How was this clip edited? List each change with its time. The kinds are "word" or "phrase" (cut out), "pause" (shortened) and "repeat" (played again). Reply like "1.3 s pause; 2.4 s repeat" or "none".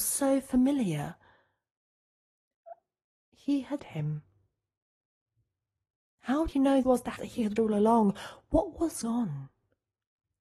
3.8 s word; 6.5 s word; 6.8 s word; 7.2 s word; 7.6 s word; 9.0 s word